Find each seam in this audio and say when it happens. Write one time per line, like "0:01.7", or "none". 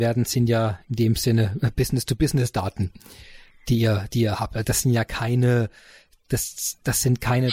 0:04.6